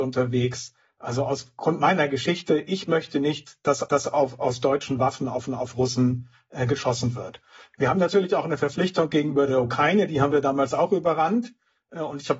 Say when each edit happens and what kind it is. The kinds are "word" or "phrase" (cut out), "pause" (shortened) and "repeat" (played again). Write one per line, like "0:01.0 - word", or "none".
0:03.8 - repeat
0:05.5 - repeat